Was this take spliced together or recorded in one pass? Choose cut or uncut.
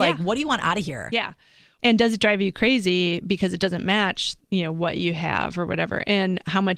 uncut